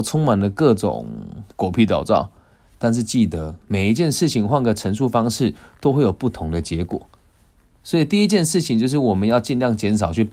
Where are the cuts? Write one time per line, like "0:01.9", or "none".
none